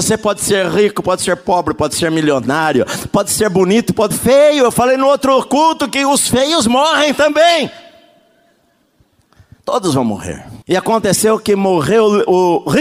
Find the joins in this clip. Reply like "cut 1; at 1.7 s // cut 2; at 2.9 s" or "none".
cut 1; at 4.1 s // cut 2; at 10.6 s